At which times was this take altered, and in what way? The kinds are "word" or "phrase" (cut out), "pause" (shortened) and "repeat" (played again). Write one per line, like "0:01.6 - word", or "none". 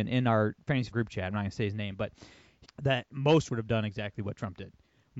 0:00.9 - word
0:02.6 - phrase
0:03.5 - word